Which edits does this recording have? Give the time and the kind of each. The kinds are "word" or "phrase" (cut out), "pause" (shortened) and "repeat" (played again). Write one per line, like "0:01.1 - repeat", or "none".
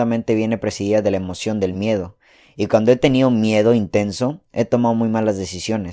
none